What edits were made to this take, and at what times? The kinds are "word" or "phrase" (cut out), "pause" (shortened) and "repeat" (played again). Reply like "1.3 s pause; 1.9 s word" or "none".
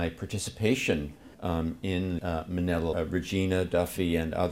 1.3 s pause; 2.2 s word; 2.9 s phrase